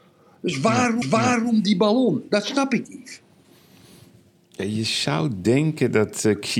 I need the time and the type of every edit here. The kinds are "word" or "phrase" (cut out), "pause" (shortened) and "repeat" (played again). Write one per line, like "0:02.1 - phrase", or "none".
0:01.0 - repeat
0:02.8 - word